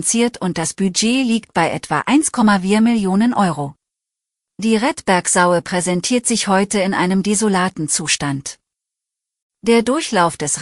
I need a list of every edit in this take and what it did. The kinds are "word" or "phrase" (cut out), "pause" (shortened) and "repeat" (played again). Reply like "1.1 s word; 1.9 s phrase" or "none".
4.0 s pause

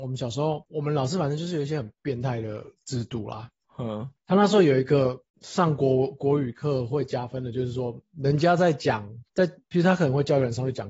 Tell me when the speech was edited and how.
4.2 s pause; 5.3 s pause; 9.3 s pause

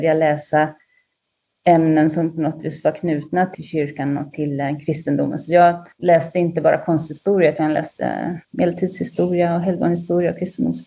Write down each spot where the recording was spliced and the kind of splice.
8.4 s pause

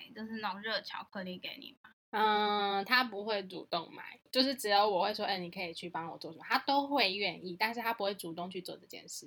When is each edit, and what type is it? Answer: none

